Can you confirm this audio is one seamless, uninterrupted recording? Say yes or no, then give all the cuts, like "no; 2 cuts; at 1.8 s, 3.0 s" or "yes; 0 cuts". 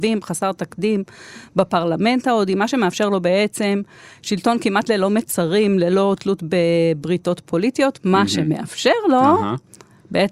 yes; 0 cuts